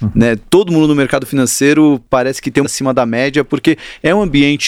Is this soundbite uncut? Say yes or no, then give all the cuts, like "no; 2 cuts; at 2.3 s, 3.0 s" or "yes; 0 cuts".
no; 1 cut; at 2.6 s